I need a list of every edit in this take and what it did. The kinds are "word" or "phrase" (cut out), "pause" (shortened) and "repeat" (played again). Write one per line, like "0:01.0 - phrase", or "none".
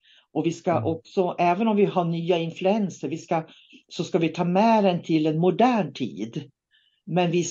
none

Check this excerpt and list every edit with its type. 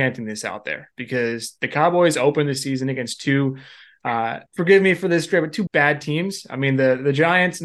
0:04.5 - pause
0:05.7 - word

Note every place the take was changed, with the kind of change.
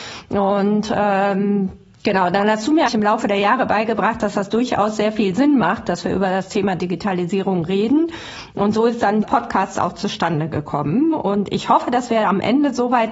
0:02.9 - word
0:09.2 - word

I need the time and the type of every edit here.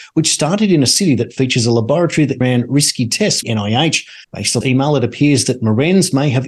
0:02.4 - word
0:03.4 - phrase
0:04.2 - pause
0:04.6 - word

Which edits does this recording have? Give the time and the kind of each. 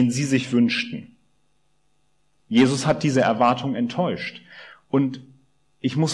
none

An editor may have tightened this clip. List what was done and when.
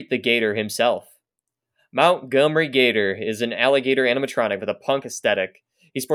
0:05.0 - word

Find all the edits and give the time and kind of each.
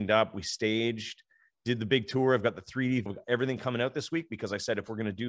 0:03.1 - word

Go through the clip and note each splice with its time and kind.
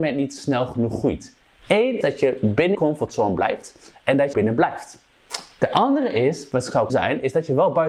0:02.0 - word
0:02.7 - word
0:04.3 - phrase
0:06.9 - word

